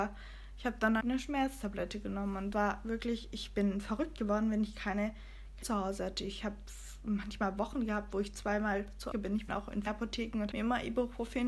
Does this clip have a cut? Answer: yes; 7 cuts; at 1.0 s, 2.5 s, 5.6 s, 9.1 s, 9.5 s, 9.9 s, 10.5 s

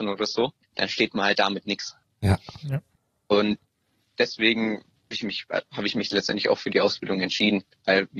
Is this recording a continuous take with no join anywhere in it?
no; 2 cuts; at 2.9 s, 5.1 s

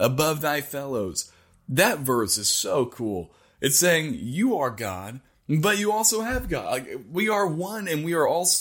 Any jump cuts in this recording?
no; 0 cuts

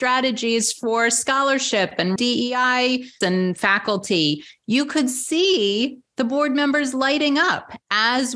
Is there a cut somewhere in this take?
yes; 2 cuts; at 2.2 s, 3.2 s

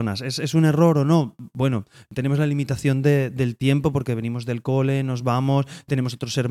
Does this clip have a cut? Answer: no; 0 cuts

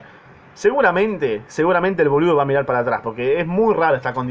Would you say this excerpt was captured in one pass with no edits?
yes; 0 cuts

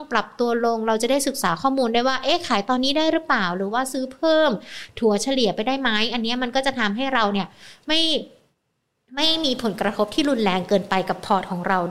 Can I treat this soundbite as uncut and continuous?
yes; 0 cuts

